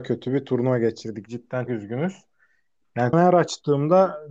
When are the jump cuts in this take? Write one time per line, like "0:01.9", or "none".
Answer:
0:01.7
0:03.1